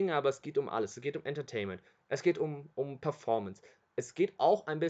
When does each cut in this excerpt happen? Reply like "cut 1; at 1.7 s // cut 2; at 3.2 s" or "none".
none